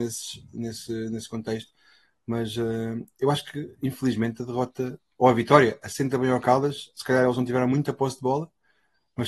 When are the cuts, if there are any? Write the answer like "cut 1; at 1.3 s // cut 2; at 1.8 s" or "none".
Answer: none